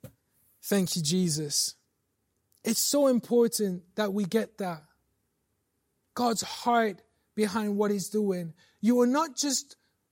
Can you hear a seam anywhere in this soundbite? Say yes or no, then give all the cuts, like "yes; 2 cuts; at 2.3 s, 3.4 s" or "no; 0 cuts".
no; 0 cuts